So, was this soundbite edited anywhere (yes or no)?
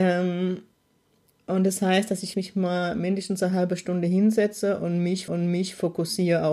yes